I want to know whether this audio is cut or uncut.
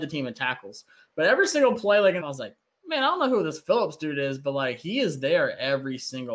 cut